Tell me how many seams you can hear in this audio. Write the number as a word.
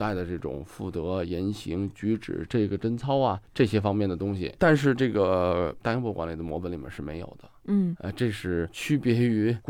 one